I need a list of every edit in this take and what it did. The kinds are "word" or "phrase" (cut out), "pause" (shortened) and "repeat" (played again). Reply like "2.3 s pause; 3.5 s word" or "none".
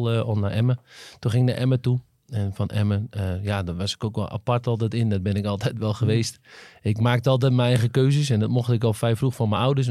none

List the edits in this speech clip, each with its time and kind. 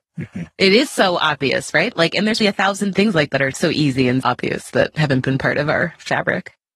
2.4 s word; 3.3 s word; 4.2 s word

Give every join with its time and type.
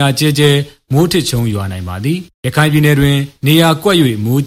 2.3 s pause

